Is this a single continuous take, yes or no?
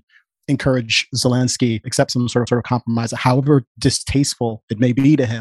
no